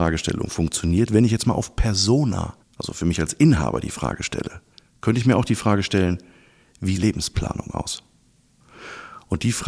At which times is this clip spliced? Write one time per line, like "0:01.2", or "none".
0:02.6
0:04.7
0:07.0